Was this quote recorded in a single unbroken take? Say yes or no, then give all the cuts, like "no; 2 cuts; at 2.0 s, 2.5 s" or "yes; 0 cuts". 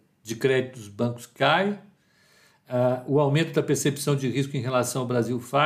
yes; 0 cuts